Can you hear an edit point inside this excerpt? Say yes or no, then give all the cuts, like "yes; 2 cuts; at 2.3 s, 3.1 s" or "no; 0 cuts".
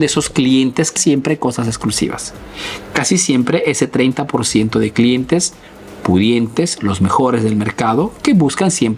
yes; 1 cut; at 1.0 s